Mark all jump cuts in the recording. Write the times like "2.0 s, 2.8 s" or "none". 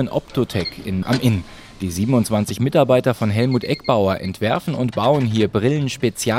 1.0 s